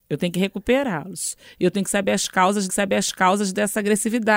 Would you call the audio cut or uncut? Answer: cut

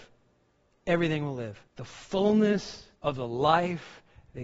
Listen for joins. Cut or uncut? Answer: cut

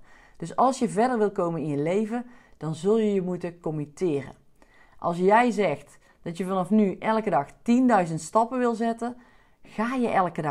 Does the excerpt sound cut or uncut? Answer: uncut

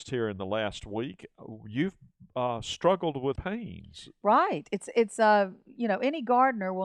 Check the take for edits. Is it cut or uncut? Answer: cut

